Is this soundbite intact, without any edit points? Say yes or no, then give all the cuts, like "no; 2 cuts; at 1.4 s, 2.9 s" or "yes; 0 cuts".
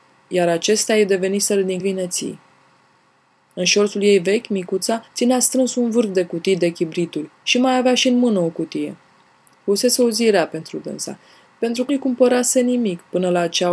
no; 4 cuts; at 1.8 s, 5.1 s, 7.3 s, 11.9 s